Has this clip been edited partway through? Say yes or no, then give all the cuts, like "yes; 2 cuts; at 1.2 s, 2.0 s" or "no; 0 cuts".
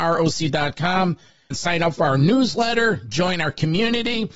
yes; 1 cut; at 1.5 s